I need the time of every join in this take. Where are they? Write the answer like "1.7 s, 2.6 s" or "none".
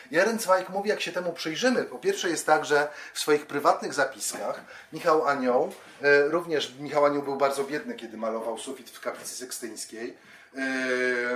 none